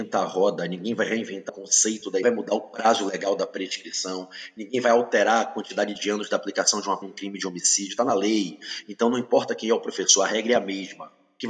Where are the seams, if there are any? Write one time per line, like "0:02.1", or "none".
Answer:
0:01.5
0:02.2
0:07.0